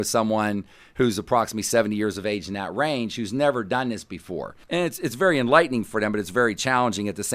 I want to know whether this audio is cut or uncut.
cut